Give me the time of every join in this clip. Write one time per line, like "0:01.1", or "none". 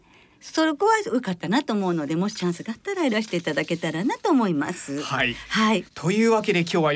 0:05.9